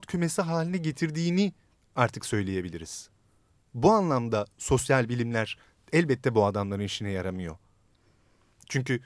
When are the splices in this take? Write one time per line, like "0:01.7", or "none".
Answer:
none